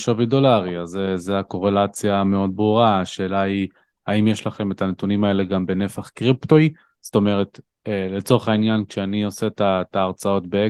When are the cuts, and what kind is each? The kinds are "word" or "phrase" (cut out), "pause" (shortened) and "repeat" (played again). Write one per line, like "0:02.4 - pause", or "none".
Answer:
none